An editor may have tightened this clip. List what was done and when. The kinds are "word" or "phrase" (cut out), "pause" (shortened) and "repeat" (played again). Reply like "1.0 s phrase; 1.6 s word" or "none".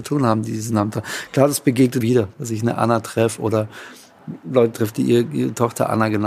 2.0 s phrase